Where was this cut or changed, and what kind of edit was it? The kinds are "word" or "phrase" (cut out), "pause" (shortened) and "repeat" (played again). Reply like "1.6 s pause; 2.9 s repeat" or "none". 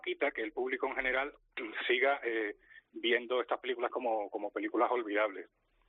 3.9 s word